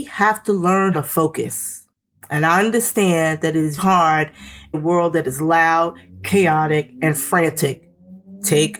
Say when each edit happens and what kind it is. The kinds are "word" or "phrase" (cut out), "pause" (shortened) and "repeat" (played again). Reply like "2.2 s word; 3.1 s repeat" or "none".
0.9 s word; 3.8 s word; 4.7 s word